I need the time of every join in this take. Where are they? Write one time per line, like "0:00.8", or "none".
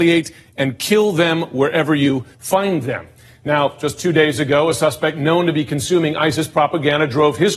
0:02.3